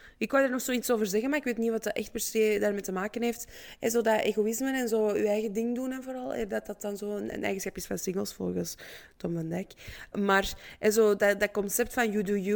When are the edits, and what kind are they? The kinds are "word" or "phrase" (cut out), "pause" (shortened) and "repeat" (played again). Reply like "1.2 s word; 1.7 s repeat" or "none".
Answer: 10.1 s word

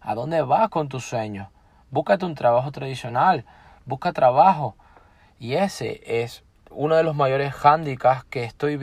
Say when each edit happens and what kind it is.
6.7 s word

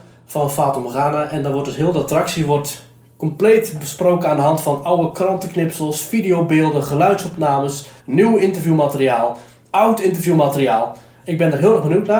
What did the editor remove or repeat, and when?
8.0 s pause

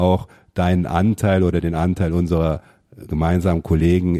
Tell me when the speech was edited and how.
none

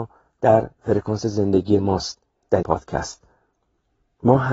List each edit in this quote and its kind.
2.6 s word

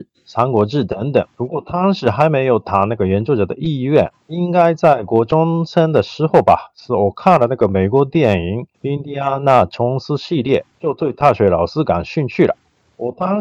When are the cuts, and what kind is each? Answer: 1.3 s pause; 4.2 s pause; 8.7 s pause; 10.7 s pause

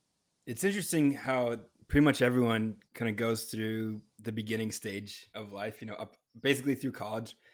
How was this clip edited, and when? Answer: 1.8 s pause; 2.9 s pause; 4.1 s pause; 5.3 s pause

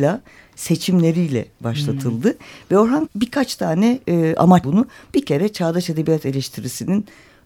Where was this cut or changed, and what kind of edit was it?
3.1 s word; 4.6 s word

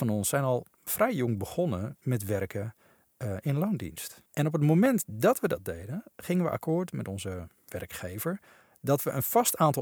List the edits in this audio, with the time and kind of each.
4.3 s pause

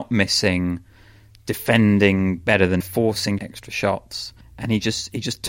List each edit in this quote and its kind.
2.8 s word; 3.4 s phrase; 4.4 s pause

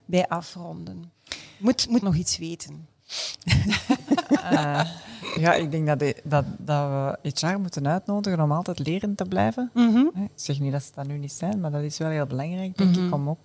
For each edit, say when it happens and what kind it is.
2.0 s word

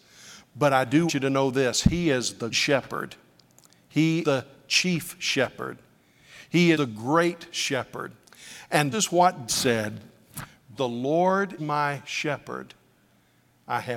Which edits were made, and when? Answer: 1.1 s word; 2.5 s word; 4.2 s word; 6.7 s word; 8.9 s word; 9.5 s word; 10.7 s word; 11.6 s word

